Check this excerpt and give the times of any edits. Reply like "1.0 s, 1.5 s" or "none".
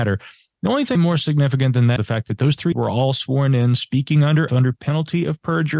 0.9 s, 2.0 s, 2.7 s, 4.5 s